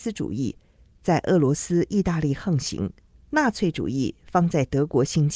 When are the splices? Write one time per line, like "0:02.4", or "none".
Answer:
0:03.1